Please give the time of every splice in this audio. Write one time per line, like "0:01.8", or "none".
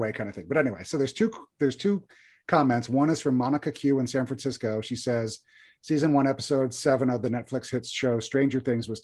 none